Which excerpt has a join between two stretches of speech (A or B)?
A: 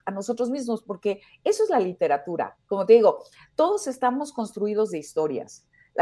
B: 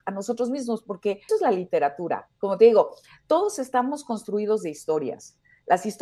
B